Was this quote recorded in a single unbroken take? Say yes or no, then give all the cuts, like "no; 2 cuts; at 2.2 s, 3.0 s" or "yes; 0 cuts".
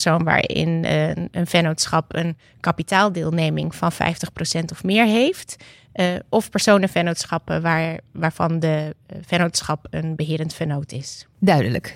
yes; 0 cuts